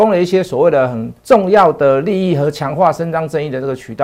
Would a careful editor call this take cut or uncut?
cut